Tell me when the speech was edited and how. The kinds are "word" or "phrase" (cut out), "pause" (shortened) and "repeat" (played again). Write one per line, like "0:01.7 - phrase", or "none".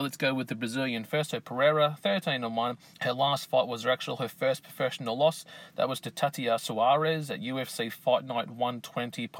0:02.9 - pause